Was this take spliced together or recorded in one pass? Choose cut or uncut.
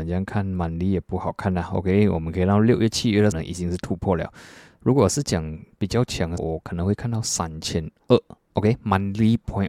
cut